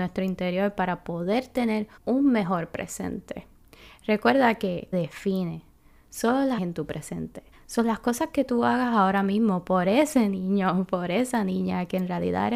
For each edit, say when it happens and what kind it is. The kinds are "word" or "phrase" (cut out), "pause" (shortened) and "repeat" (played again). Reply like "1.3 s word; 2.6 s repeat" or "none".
2.0 s pause; 4.9 s phrase; 6.6 s phrase; 7.5 s pause

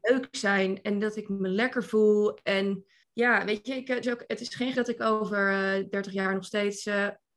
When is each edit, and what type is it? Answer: 3.0 s word; 4.0 s word; 4.7 s word

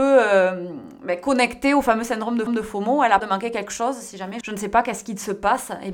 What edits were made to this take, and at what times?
2.5 s repeat; 3.2 s word; 4.4 s word

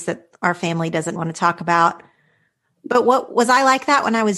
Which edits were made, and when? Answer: 1.2 s word

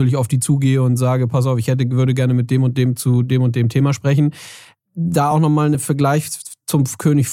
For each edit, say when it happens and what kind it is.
none

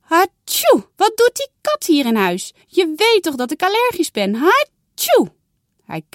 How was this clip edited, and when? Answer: 0.9 s pause; 2.6 s pause

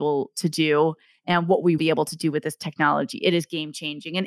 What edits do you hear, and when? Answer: 1.8 s word

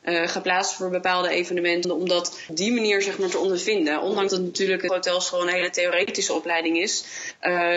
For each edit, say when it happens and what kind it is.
1.8 s word; 2.5 s word; 4.3 s word; 4.9 s word

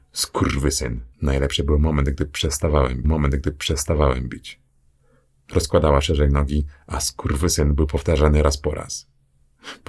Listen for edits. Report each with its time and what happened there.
1.1 s pause; 3.0 s repeat

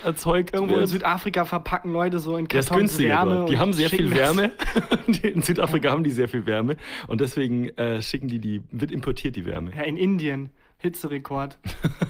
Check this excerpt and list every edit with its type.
none

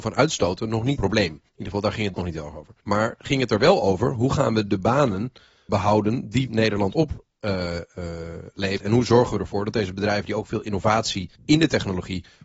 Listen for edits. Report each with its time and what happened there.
1.0 s phrase; 1.5 s pause; 2.1 s word; 2.8 s pause; 5.7 s word; 6.5 s word; 8.8 s word; 11.4 s pause

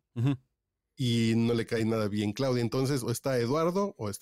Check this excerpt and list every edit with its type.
none

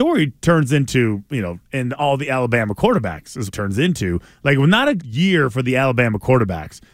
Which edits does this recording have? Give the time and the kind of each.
1.6 s word; 3.5 s word; 5.0 s word

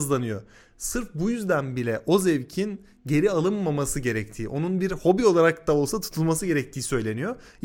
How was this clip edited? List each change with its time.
none

